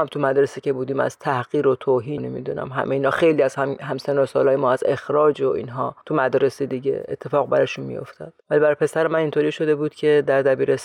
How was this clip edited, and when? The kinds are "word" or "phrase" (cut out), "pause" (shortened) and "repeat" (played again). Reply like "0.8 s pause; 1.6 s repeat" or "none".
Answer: 2.2 s word; 6.0 s pause; 8.4 s pause